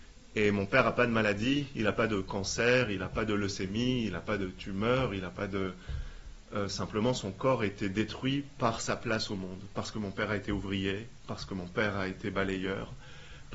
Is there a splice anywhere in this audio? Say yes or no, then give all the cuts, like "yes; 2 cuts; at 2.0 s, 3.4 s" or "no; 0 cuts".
no; 0 cuts